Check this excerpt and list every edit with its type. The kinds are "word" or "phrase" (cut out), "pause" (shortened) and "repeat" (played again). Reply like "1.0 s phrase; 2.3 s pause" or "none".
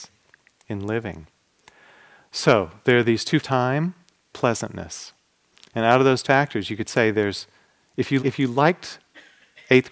3.4 s word; 4.3 s word; 6.2 s word; 8.2 s word